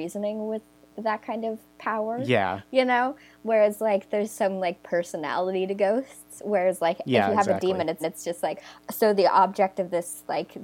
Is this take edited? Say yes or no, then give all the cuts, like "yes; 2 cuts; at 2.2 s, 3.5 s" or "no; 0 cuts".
yes; 1 cut; at 8.0 s